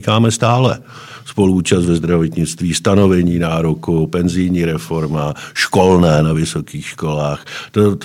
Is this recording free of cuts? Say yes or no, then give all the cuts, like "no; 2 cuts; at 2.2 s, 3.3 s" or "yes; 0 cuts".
yes; 0 cuts